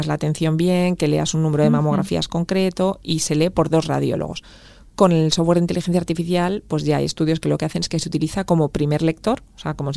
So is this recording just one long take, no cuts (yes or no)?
yes